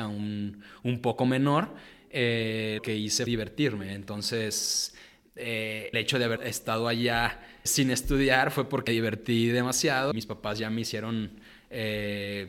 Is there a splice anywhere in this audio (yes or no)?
yes